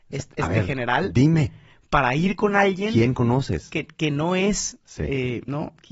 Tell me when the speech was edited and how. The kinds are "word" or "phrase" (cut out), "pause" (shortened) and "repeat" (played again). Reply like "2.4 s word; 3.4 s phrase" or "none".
none